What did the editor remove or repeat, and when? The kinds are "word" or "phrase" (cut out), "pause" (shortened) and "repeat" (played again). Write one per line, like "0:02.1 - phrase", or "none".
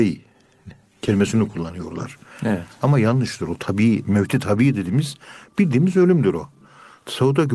none